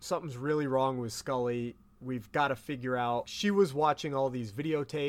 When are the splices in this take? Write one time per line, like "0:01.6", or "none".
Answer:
0:03.2